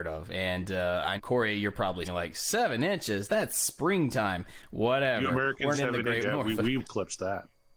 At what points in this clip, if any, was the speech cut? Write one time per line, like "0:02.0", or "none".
0:01.2
0:02.0
0:05.7
0:06.2
0:06.8